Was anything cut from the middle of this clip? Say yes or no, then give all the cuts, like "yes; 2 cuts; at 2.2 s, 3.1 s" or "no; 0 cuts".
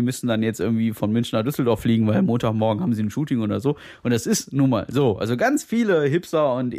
no; 0 cuts